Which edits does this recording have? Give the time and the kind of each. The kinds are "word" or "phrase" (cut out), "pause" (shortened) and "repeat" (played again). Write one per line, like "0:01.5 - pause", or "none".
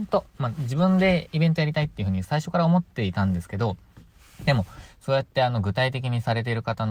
none